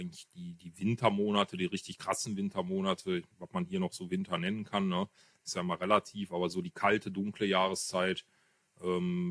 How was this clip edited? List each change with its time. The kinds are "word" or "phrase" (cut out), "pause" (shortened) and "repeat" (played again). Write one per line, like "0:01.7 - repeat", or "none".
0:03.3 - pause